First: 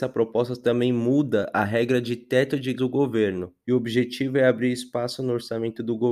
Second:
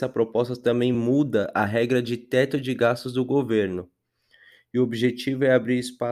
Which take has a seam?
first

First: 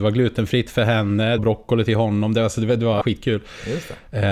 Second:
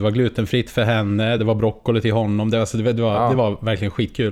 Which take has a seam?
first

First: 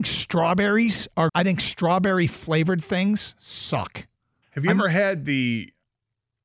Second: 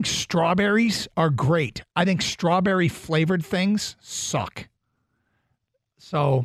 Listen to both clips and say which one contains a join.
first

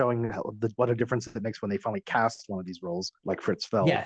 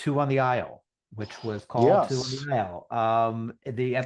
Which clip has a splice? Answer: first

